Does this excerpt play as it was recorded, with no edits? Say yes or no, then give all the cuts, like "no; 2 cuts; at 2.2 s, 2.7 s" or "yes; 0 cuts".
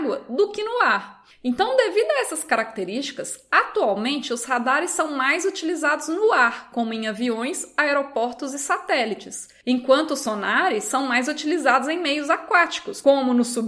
yes; 0 cuts